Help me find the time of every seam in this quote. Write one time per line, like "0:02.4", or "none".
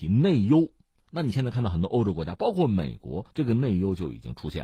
0:03.3

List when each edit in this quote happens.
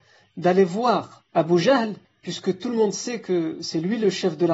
0:01.3
0:02.0

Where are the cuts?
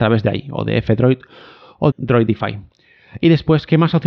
0:01.9

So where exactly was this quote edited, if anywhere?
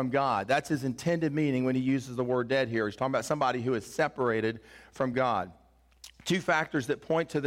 none

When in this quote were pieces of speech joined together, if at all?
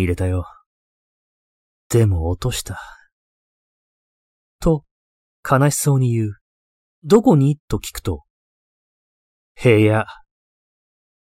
0:06.7

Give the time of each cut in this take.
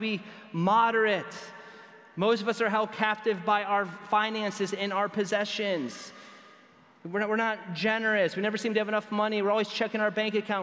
none

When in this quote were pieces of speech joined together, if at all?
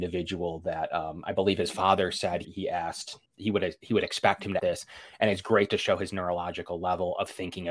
0:02.4
0:03.3
0:04.6

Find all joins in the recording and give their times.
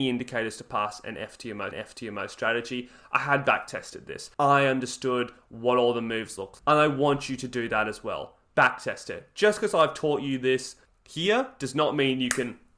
0:01.7
0:04.3
0:06.6
0:10.9

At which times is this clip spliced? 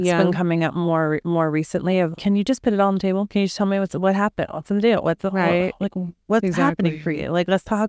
0:02.1

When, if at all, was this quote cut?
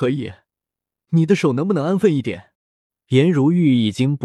0:02.6

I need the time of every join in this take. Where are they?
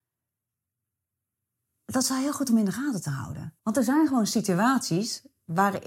0:03.6

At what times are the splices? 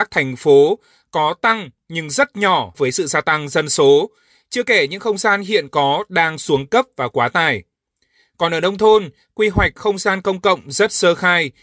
0:02.7

